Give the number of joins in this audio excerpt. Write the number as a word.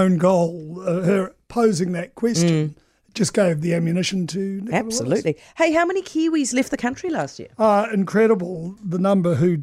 zero